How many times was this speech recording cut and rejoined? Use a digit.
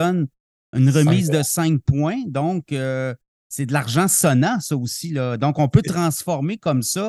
0